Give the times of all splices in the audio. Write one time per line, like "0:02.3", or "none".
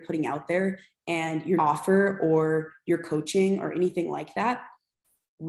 0:01.6

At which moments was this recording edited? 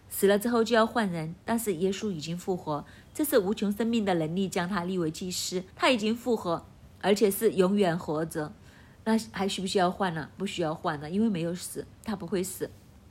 0:05.7
0:11.9

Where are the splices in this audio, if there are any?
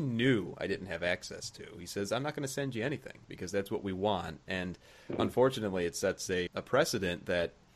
0:06.5

